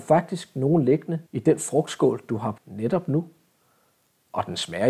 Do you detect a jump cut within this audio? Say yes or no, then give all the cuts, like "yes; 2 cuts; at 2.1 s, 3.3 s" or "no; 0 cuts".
yes; 2 cuts; at 1.3 s, 2.6 s